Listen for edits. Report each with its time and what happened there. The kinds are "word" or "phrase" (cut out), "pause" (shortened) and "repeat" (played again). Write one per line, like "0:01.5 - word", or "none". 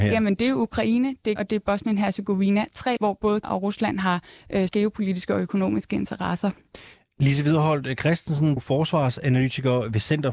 0:01.4 - word
0:03.0 - word
0:03.4 - word
0:04.7 - word
0:08.6 - word